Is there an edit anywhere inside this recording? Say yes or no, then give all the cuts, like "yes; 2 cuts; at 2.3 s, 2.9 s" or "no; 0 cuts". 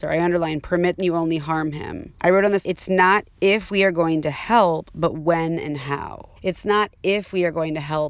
yes; 4 cuts; at 1.0 s, 2.2 s, 2.6 s, 6.4 s